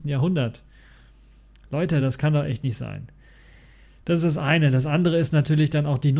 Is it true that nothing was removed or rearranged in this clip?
yes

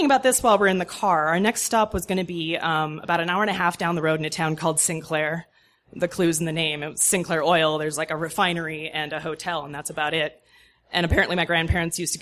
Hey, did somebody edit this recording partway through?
no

